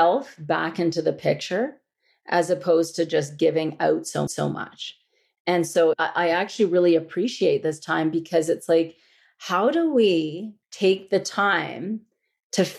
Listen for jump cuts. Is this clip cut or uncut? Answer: cut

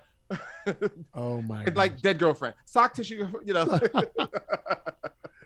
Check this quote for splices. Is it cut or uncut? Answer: cut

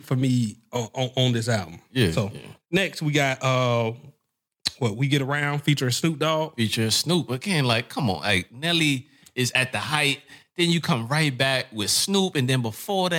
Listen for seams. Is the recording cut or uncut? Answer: uncut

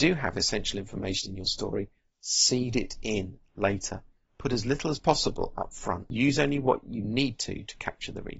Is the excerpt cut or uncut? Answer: uncut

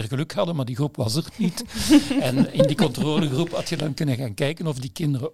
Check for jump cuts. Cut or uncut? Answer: uncut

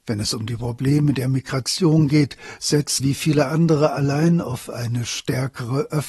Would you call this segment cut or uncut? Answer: cut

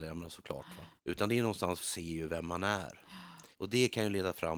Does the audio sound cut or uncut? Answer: cut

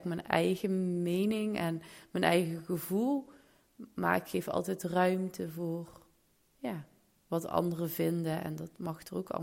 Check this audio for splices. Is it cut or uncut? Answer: uncut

